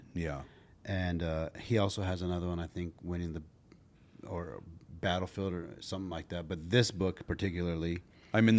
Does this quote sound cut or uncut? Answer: uncut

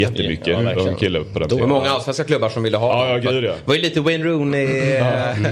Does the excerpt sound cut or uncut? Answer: uncut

